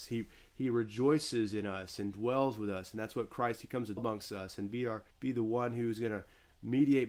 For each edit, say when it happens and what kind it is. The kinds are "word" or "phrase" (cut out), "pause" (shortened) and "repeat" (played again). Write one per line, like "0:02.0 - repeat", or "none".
0:04.0 - word
0:05.1 - pause